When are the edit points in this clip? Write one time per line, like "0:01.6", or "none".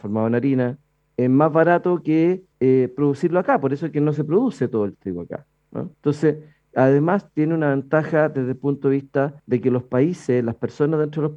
0:02.5
0:05.9
0:09.4